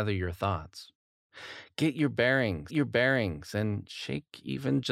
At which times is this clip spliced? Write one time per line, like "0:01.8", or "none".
0:02.7